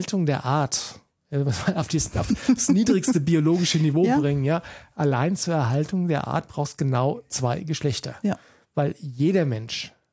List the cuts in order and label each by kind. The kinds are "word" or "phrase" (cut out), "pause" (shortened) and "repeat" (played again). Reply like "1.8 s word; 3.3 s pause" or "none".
none